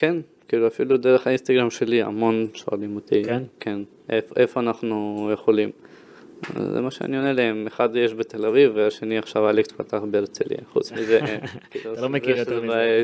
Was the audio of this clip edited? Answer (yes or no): no